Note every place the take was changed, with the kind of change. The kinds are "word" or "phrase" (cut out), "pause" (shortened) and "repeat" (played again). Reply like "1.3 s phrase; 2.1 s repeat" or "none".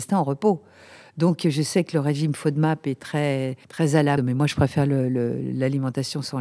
3.6 s pause; 4.2 s word